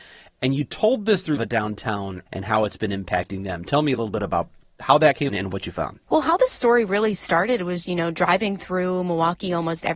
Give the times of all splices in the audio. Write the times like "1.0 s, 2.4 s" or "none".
1.4 s, 2.3 s, 5.3 s, 7.9 s